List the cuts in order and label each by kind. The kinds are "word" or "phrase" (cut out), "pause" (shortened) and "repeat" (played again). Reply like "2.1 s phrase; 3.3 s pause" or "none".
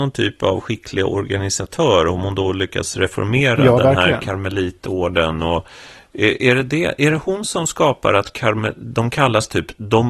none